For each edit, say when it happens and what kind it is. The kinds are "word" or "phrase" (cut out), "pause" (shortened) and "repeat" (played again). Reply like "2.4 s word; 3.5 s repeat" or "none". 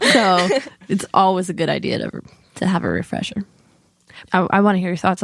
none